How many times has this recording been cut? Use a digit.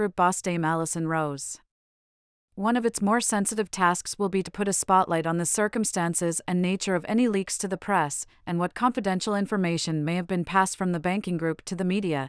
1